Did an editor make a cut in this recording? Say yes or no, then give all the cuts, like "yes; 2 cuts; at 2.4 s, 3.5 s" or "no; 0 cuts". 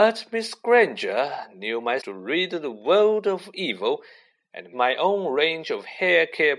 yes; 2 cuts; at 2.0 s, 4.7 s